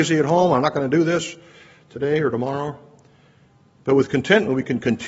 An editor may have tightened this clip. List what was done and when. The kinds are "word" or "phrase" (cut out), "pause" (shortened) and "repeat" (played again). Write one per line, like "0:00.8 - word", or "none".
none